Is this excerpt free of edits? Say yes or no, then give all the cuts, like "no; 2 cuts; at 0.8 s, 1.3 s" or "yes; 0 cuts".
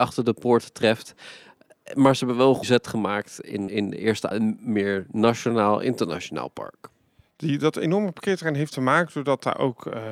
no; 3 cuts; at 2.6 s, 3.7 s, 4.3 s